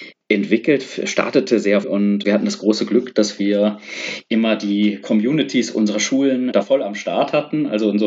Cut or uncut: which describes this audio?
cut